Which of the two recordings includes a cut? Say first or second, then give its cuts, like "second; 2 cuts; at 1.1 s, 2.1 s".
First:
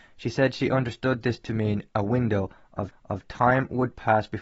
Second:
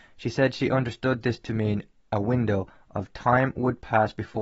first; 2 cuts; at 1.9 s, 2.9 s